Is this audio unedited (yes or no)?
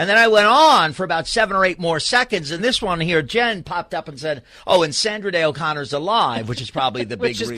no